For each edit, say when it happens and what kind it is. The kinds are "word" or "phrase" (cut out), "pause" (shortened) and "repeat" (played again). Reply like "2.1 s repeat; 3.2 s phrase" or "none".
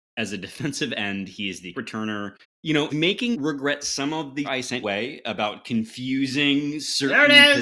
1.7 s word; 2.4 s word; 2.9 s word; 3.3 s word; 4.4 s word; 4.8 s word